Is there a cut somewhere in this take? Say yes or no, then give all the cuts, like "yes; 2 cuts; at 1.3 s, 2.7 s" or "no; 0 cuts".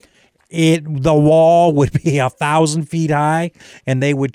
no; 0 cuts